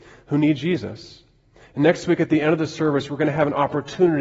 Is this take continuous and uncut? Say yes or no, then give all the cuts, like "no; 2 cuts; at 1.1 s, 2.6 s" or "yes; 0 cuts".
yes; 0 cuts